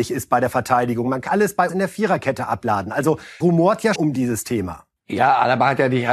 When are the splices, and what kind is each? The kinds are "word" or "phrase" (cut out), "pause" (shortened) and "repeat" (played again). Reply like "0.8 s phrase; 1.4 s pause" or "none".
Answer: 1.3 s word; 1.7 s word; 3.4 s word; 4.0 s word